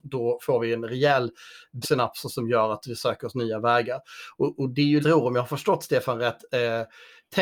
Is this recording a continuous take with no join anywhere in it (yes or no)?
no